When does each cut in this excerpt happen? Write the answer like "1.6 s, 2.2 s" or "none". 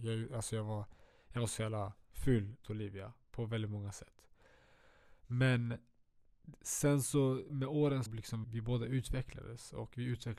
2.6 s, 7.5 s, 8.1 s, 8.4 s